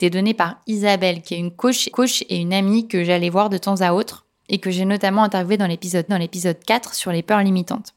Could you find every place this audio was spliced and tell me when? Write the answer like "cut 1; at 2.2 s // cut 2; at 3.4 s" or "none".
cut 1; at 1.9 s // cut 2; at 6.1 s